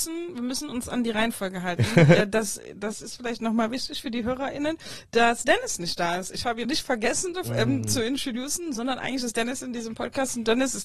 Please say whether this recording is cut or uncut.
cut